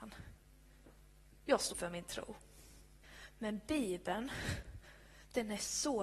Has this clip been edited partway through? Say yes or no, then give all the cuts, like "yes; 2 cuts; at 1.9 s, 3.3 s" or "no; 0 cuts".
yes; 1 cut; at 1.7 s